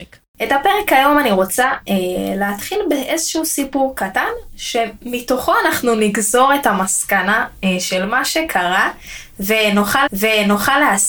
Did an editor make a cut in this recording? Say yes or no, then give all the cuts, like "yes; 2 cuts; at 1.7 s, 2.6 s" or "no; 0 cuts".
yes; 1 cut; at 10.1 s